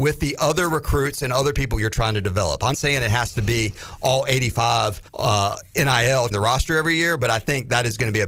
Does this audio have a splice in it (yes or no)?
yes